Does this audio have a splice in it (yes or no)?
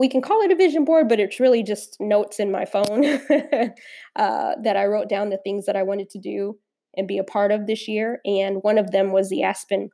no